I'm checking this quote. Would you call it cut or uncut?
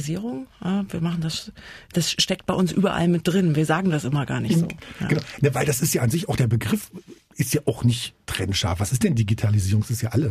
uncut